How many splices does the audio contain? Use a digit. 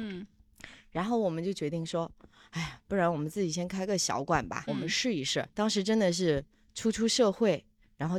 2